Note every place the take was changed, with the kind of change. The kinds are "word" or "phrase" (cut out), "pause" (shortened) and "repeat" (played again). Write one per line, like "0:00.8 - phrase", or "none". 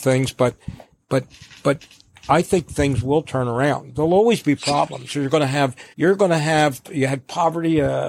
0:05.9 - pause